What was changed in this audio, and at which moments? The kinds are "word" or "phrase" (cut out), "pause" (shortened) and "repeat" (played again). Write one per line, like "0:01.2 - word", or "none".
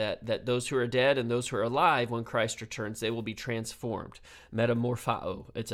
none